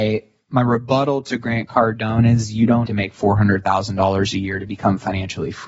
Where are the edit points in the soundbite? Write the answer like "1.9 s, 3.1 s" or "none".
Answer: 2.9 s

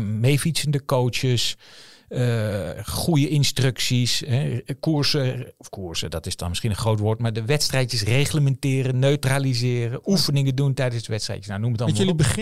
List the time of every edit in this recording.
none

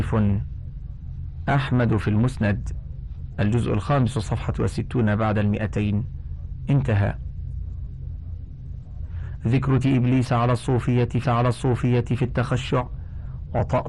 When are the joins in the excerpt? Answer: 4.5 s, 9.8 s, 11.2 s

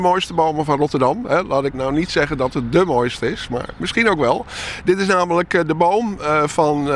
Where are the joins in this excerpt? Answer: 1.7 s

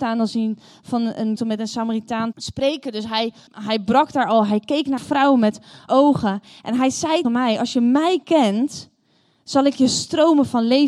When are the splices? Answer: 1.4 s, 2.3 s, 3.5 s, 5.0 s, 5.9 s, 7.2 s

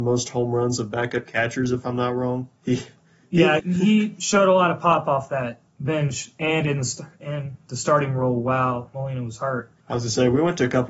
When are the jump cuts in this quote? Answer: 2.6 s, 3.6 s, 5.7 s, 9.8 s

